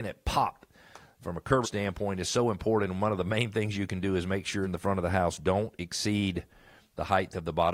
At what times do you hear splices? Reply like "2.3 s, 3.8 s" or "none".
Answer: 1.6 s, 4.6 s